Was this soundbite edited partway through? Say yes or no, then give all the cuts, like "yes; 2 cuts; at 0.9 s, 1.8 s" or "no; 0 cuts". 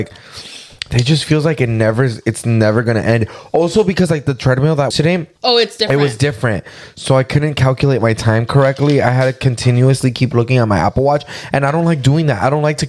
yes; 2 cuts; at 4.9 s, 5.4 s